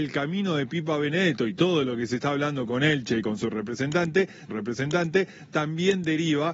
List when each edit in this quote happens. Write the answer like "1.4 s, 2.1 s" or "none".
4.5 s